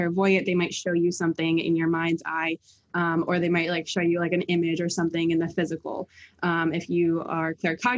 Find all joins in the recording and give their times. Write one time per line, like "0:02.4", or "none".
none

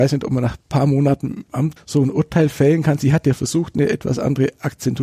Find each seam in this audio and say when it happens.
0:01.8

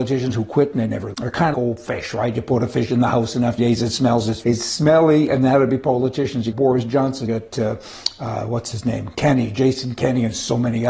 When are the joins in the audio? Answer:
0:01.1
0:01.5
0:03.6
0:04.4
0:06.5
0:07.3

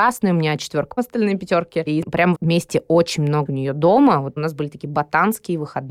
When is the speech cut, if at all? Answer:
0:01.0
0:02.0
0:02.3
0:03.5
0:04.4

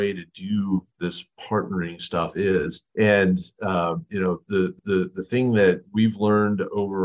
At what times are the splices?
0:02.9
0:04.8

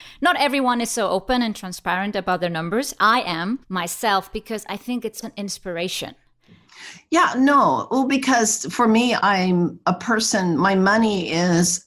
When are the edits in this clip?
0:03.6
0:05.2

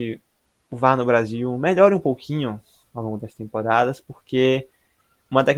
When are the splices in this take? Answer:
none

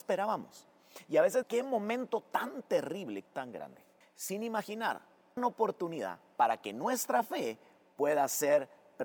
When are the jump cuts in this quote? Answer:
0:01.4
0:03.3
0:04.0
0:05.4

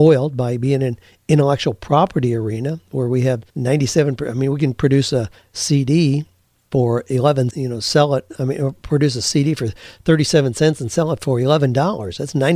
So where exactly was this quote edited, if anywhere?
0:03.5
0:06.4
0:07.5

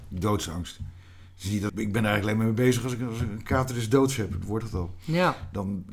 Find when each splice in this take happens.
0:01.7
0:04.6

